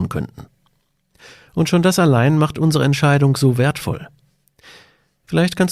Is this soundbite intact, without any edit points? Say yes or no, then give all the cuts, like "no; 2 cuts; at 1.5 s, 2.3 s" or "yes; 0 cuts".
yes; 0 cuts